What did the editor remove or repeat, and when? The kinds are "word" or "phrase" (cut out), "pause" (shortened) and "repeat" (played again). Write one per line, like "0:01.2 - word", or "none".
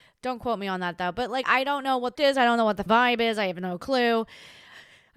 0:01.4 - word
0:02.1 - phrase
0:02.9 - word